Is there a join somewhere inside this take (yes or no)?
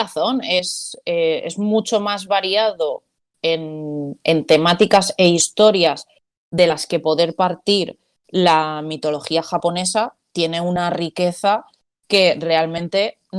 no